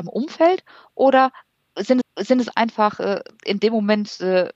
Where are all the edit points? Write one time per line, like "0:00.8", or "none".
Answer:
0:02.0